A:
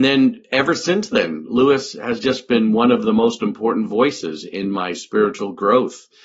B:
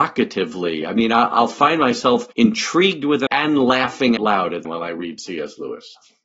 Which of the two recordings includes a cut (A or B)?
B